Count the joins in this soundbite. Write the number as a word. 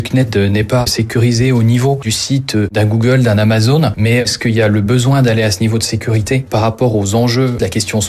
zero